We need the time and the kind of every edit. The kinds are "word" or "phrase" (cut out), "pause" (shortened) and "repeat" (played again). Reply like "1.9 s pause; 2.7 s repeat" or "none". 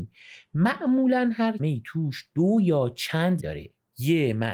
1.6 s word; 3.4 s word

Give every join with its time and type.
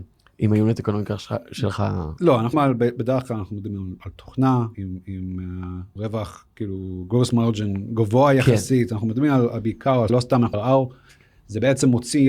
2.5 s word; 4.7 s word; 6.0 s word; 10.1 s word; 10.5 s word

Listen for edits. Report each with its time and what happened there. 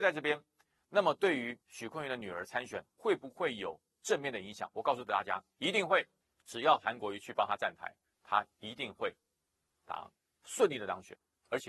1.6 s pause; 6.2 s pause; 8.1 s phrase

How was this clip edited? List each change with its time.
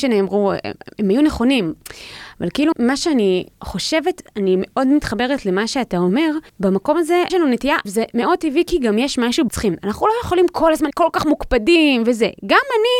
2.7 s word; 3.5 s pause; 6.5 s pause; 7.3 s phrase; 7.9 s word; 9.5 s phrase; 10.9 s word

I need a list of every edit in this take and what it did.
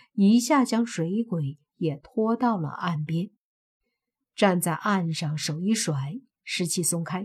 none

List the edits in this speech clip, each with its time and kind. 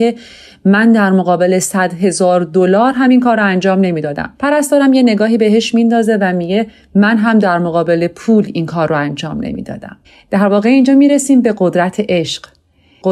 4.3 s pause; 10.0 s pause

